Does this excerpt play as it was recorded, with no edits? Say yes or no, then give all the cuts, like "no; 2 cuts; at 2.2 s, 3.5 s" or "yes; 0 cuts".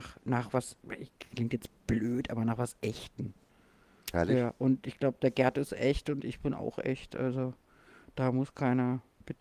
yes; 0 cuts